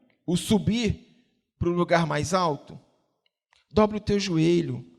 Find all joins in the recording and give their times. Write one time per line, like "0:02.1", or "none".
none